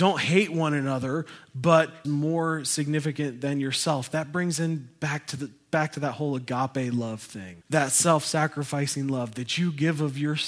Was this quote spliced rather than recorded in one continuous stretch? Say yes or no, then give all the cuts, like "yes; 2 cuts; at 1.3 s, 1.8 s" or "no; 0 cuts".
yes; 2 cuts; at 2.0 s, 7.6 s